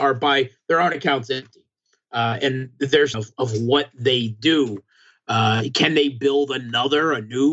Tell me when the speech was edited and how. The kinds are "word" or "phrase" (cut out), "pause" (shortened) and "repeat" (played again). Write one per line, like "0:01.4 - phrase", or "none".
0:03.1 - phrase